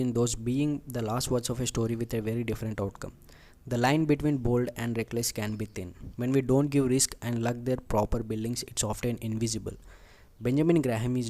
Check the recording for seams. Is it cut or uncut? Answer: uncut